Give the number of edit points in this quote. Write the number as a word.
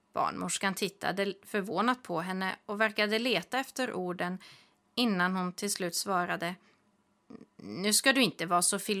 zero